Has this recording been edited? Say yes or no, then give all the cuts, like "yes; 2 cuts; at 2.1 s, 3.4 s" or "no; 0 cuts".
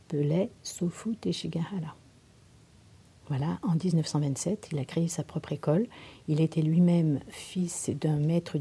yes; 1 cut; at 7.3 s